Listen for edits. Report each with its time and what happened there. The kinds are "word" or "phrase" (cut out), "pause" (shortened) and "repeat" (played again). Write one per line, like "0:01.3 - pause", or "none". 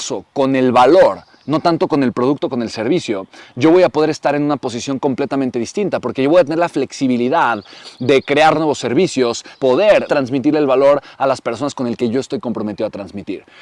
0:08.5 - phrase
0:09.5 - phrase
0:10.1 - word